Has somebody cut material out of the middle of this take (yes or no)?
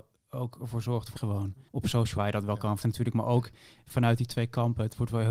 yes